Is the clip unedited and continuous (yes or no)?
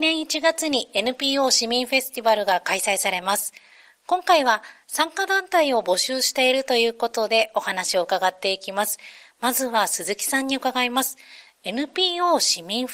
yes